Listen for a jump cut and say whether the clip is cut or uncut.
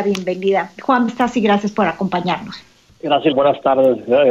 cut